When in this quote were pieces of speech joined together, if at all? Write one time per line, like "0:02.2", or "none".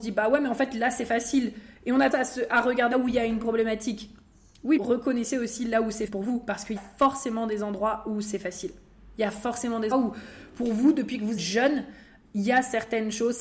0:02.1
0:02.9
0:04.8
0:06.1
0:06.8
0:09.9
0:11.4
0:12.2